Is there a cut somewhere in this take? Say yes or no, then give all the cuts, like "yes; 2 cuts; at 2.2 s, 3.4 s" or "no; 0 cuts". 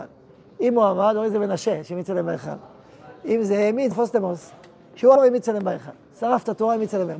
yes; 2 cuts; at 3.9 s, 5.2 s